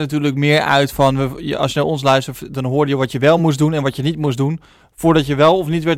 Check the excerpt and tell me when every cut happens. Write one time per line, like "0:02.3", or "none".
none